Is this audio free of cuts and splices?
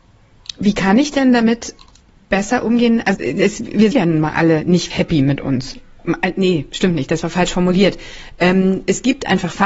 no; 3 cuts; at 3.1 s, 3.9 s, 4.9 s

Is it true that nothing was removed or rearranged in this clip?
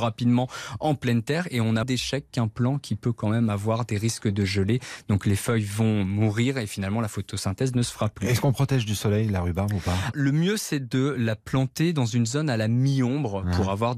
no; 2 cuts; at 1.8 s, 10.1 s

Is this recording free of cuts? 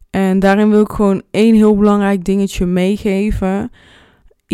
yes; 0 cuts

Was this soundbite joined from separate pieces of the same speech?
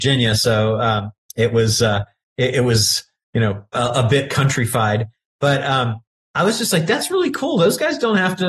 no; 0 cuts

